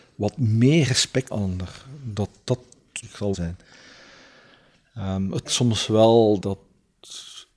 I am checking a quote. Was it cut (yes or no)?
yes